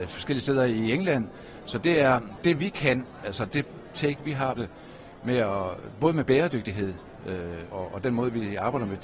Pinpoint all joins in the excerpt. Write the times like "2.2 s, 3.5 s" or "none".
2.4 s, 4.6 s, 7.7 s